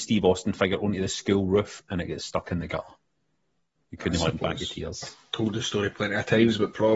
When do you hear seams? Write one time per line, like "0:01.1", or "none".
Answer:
none